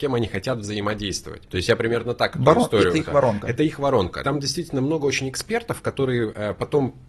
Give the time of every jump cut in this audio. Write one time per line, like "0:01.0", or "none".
none